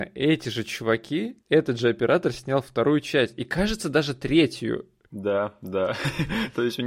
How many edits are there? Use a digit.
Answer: 1